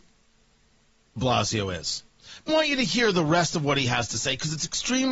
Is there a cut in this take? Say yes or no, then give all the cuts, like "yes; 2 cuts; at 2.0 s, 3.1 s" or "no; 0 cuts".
yes; 2 cuts; at 1.2 s, 2.5 s